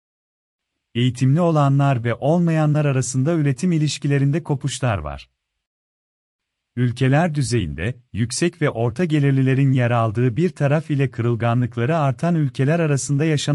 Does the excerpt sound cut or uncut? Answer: uncut